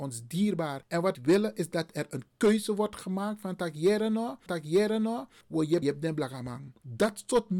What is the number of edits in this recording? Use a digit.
3